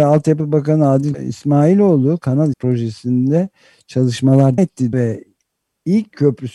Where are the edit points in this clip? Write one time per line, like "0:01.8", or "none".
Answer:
0:01.1
0:02.5
0:04.6
0:04.9